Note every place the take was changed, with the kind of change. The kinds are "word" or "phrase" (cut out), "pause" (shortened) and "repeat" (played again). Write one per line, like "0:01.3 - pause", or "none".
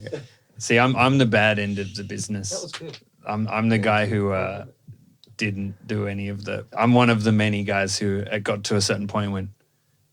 0:06.7 - pause